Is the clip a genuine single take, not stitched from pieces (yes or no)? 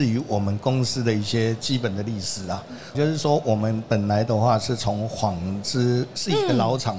no